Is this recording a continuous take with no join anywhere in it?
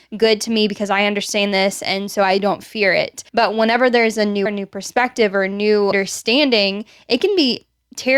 no; 3 cuts; at 3.3 s, 4.5 s, 5.9 s

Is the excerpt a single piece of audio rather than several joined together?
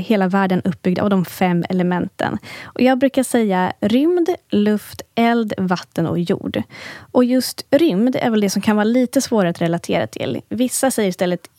yes; 0 cuts

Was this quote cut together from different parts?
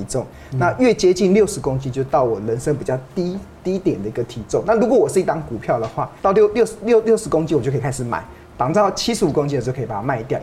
yes; 1 cut; at 6.2 s

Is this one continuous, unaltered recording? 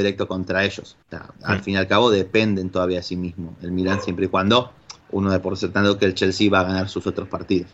no; 3 cuts; at 1.0 s, 1.4 s, 5.0 s

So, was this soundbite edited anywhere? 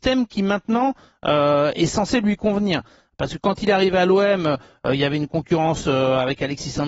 no; 0 cuts

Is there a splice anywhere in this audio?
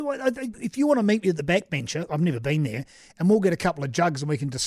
no; 0 cuts

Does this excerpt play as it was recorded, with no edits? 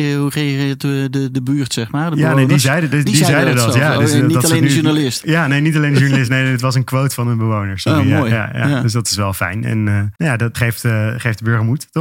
no; 3 cuts; at 3.1 s, 10.2 s, 10.5 s

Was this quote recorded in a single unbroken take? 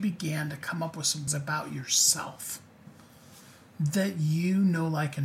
no; 1 cut; at 1.3 s

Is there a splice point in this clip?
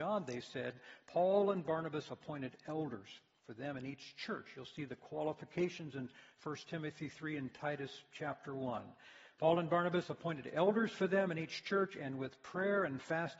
no; 0 cuts

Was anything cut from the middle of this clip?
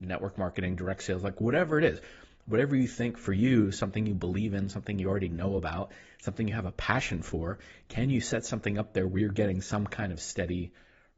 no; 0 cuts

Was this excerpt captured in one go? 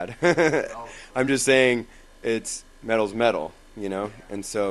yes; 0 cuts

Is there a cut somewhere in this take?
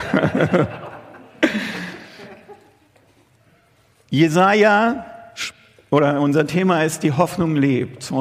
no; 0 cuts

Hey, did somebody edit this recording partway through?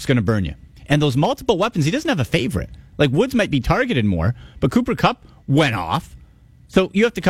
no; 0 cuts

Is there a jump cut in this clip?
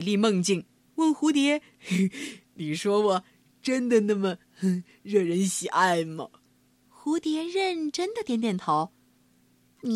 yes; 1 cut; at 6.4 s

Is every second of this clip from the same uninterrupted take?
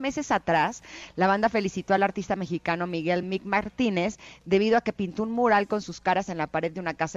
yes; 0 cuts

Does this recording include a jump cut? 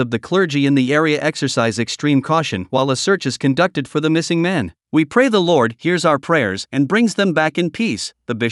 yes; 1 cut; at 4.8 s

